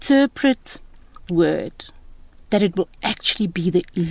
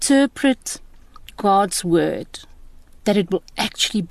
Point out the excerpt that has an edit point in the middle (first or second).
first